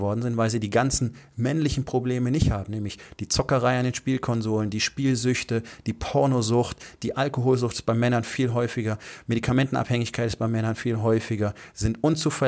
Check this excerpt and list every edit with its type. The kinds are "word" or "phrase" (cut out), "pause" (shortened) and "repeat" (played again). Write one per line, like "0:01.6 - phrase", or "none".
none